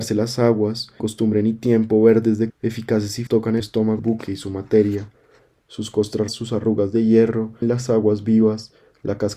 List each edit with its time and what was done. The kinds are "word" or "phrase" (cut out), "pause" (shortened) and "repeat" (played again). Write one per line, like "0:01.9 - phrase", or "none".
0:01.0 - word
0:02.5 - word
0:03.3 - word
0:03.6 - word
0:04.0 - word
0:05.6 - word
0:06.3 - word
0:07.6 - word